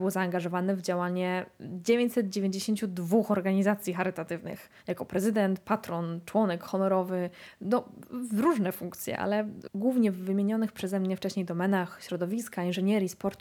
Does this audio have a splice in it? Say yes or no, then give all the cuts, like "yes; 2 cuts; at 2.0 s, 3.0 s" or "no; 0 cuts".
yes; 1 cut; at 4.8 s